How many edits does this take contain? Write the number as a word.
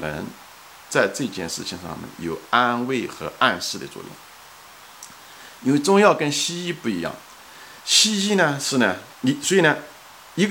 two